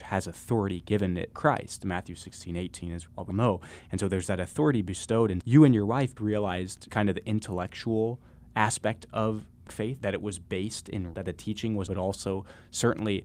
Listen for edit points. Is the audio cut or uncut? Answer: cut